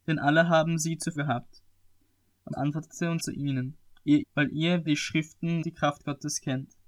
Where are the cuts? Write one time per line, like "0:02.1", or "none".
0:01.2
0:02.5
0:03.2
0:04.2
0:04.9
0:05.6